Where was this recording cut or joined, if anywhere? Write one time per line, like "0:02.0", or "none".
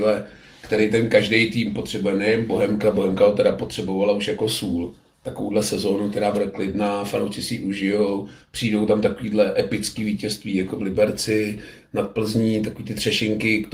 none